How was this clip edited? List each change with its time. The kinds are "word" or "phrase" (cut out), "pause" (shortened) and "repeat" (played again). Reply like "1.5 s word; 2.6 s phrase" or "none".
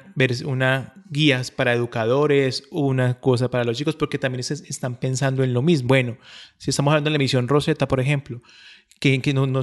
5.9 s word